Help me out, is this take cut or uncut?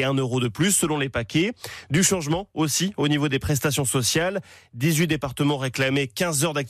uncut